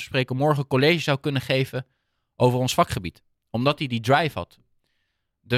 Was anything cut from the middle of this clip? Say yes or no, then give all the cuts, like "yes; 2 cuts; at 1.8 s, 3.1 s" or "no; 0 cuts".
no; 0 cuts